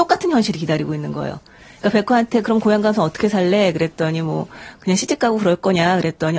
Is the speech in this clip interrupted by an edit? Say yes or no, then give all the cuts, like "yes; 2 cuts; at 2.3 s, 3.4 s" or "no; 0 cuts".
no; 0 cuts